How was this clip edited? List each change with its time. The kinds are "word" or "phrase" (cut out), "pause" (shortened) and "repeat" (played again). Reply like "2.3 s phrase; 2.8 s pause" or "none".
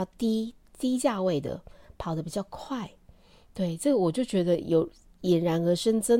none